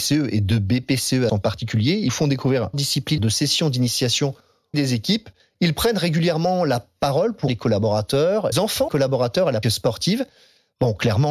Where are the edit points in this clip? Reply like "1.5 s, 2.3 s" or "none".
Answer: 1.3 s, 2.1 s, 2.7 s, 3.2 s, 4.7 s, 7.5 s, 8.5 s, 8.9 s, 9.6 s